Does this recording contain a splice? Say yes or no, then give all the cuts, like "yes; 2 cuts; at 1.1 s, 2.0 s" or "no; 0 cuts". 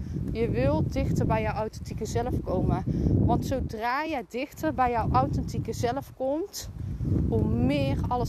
no; 0 cuts